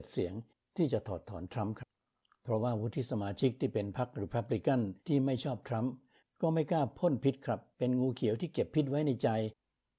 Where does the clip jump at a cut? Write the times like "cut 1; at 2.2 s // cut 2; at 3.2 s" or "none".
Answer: cut 1; at 5.0 s